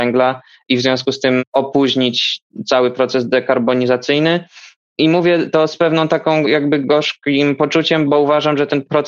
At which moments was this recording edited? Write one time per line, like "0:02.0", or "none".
none